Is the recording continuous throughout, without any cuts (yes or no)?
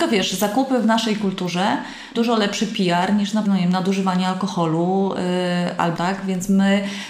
no